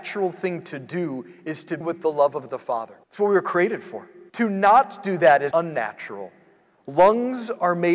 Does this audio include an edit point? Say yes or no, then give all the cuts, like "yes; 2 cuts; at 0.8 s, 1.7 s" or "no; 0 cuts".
yes; 4 cuts; at 1.8 s, 3.0 s, 4.3 s, 5.5 s